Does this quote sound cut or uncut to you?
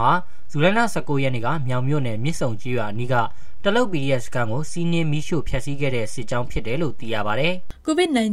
uncut